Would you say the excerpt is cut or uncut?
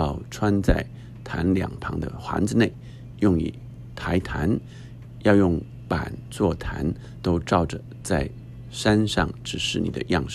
cut